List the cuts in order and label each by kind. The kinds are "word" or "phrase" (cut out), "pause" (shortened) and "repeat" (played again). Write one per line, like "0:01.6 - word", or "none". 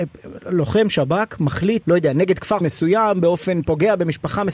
0:01.8 - word
0:02.6 - word